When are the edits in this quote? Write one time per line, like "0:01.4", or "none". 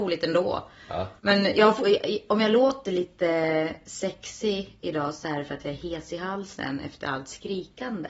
0:01.2